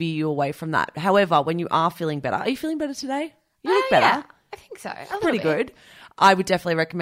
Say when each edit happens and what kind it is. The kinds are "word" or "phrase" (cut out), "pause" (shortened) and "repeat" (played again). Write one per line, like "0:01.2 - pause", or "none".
none